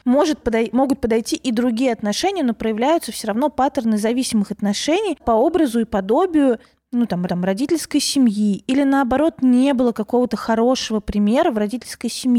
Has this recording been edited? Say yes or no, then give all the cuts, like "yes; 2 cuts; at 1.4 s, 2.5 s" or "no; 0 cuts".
yes; 2 cuts; at 5.2 s, 7.3 s